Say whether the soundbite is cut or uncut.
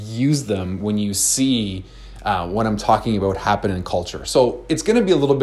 uncut